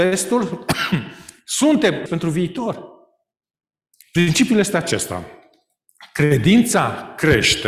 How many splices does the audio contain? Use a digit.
2